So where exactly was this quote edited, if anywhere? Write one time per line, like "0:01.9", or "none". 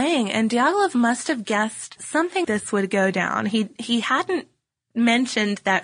0:02.0
0:02.4